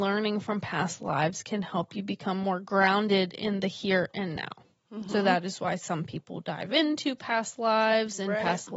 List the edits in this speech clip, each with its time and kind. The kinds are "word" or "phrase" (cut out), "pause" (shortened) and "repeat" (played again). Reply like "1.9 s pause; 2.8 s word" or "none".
none